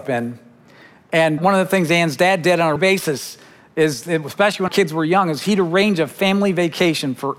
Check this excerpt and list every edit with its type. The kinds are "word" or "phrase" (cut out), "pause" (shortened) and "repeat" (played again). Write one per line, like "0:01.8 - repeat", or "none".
0:01.4 - word
0:02.8 - word
0:04.7 - word